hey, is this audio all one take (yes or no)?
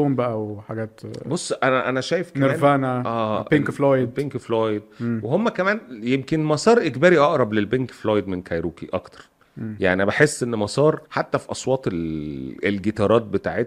no